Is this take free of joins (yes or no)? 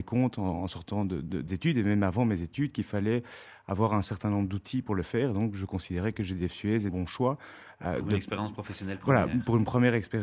no